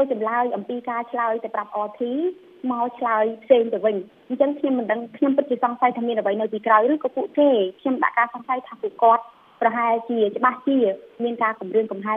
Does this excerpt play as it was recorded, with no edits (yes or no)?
yes